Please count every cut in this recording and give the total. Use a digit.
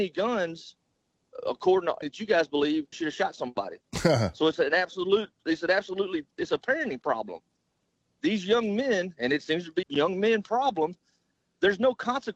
3